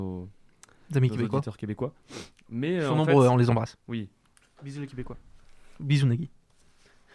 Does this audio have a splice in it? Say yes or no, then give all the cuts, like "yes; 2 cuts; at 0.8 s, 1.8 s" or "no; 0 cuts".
no; 0 cuts